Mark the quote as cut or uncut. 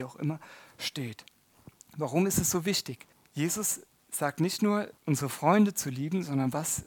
cut